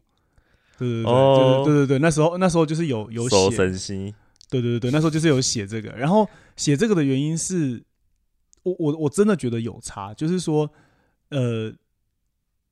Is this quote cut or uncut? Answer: uncut